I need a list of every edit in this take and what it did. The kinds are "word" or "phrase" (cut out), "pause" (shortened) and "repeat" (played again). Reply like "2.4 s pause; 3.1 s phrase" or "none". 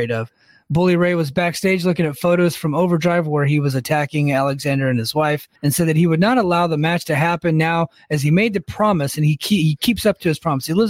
5.6 s pause